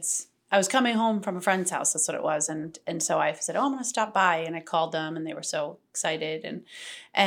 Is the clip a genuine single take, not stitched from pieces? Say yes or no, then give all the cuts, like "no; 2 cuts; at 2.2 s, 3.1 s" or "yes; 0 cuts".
yes; 0 cuts